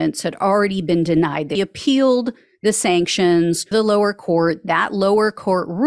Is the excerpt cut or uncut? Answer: cut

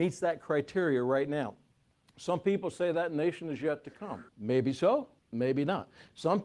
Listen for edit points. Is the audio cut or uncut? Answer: cut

